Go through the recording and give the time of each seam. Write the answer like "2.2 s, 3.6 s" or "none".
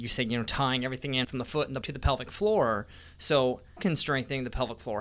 1.2 s, 1.8 s, 3.8 s

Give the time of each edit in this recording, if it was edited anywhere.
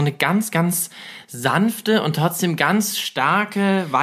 none

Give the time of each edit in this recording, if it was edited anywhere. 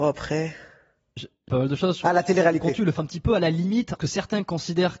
1.2 s, 1.5 s, 3.0 s, 4.0 s

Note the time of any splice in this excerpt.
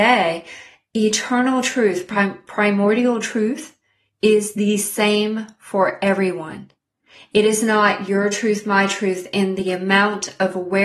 none

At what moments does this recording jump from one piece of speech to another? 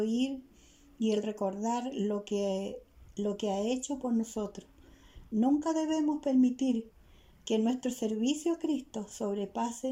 none

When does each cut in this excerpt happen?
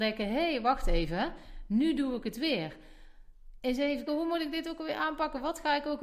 4.1 s

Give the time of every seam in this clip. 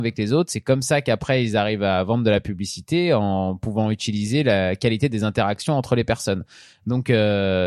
none

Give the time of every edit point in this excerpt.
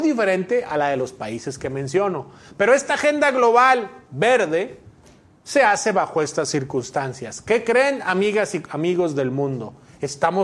none

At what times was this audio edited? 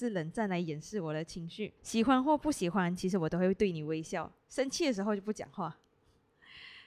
1.8 s

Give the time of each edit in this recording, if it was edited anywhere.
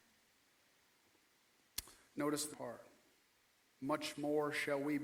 2.5 s, 3.2 s

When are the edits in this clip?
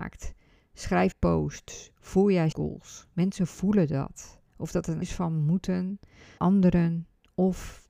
1.1 s, 2.5 s, 5.0 s, 6.4 s

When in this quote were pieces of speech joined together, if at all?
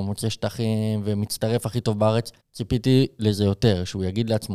2.4 s

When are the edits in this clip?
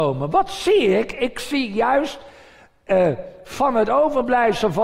none

